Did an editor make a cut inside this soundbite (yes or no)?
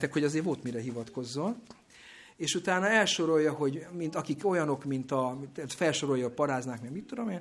no